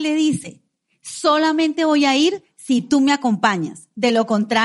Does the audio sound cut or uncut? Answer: uncut